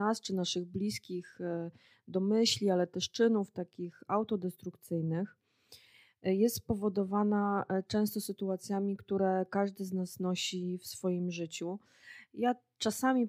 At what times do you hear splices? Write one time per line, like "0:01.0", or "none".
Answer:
none

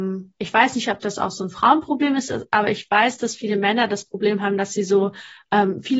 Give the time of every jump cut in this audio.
none

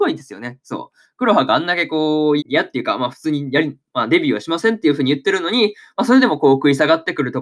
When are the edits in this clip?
0:02.4

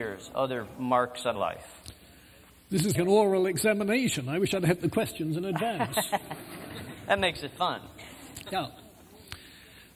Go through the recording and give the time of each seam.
0:01.3
0:02.9

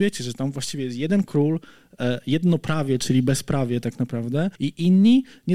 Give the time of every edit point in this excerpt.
0:04.5

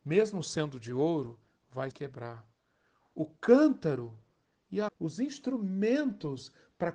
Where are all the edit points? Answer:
0:01.9
0:04.9

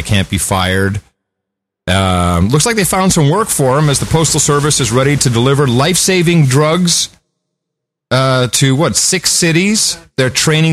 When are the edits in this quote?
none

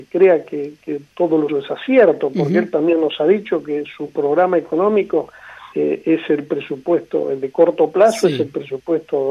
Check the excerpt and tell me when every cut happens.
0:01.5
0:05.7

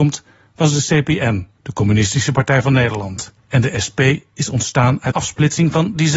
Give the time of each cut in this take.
0:01.6
0:03.4
0:05.1

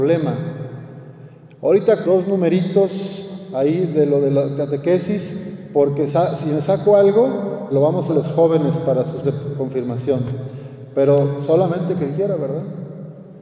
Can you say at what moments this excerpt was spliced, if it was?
0:02.0
0:06.1
0:07.7
0:08.1
0:09.2
0:12.1

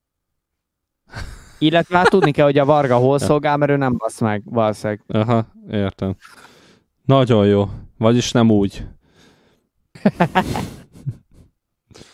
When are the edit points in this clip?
none

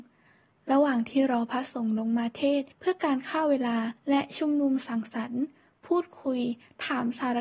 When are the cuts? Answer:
0:02.7
0:04.0

